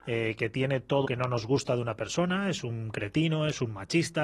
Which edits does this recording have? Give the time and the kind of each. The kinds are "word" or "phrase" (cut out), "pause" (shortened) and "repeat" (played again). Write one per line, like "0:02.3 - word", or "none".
0:01.1 - word